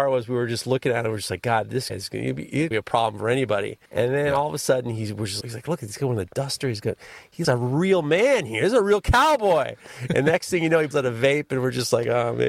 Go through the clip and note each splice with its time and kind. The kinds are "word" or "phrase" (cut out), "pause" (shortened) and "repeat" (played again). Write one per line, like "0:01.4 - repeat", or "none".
0:01.9 - word
0:02.7 - word
0:03.9 - pause
0:05.4 - word
0:07.4 - word
0:10.9 - word